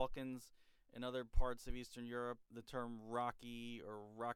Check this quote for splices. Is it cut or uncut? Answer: cut